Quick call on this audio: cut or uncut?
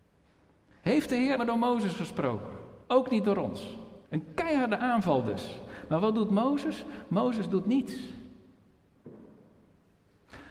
cut